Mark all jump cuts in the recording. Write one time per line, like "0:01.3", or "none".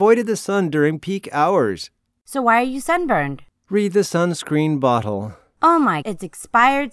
0:06.0

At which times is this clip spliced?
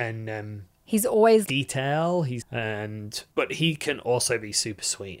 0:01.5
0:02.4
0:03.3

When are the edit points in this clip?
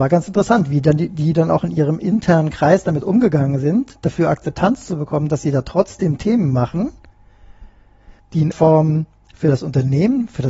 0:08.2
0:08.5

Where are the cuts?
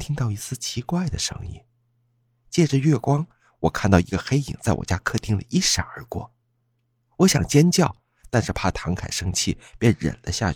none

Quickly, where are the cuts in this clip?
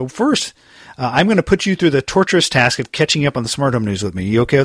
none

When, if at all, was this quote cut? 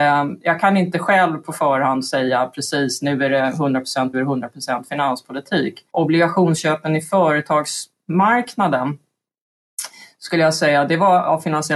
0:04.1
0:05.9

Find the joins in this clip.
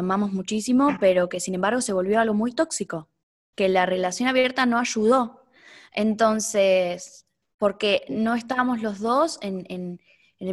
none

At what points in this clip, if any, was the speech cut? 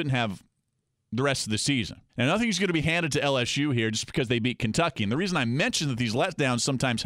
0:02.1

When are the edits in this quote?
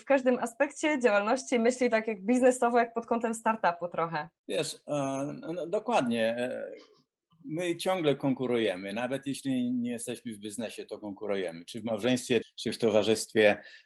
0:04.4
0:07.1
0:12.4

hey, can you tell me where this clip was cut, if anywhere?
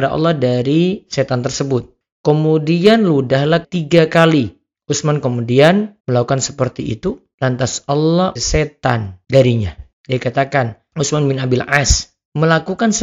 0:03.6
0:06.0
0:08.4

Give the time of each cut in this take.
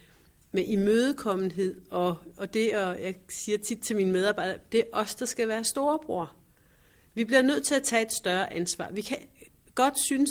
none

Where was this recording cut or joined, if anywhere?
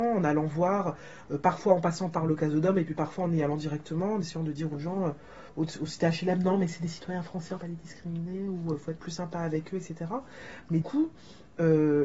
0:05.5
0:07.6
0:10.8

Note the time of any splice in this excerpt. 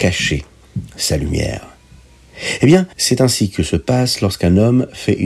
0:02.9

